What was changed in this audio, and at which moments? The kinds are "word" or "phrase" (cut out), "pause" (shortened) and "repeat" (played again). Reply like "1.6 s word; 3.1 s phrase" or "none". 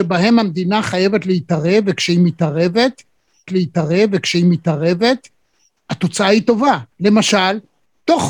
3.5 s repeat; 6.9 s pause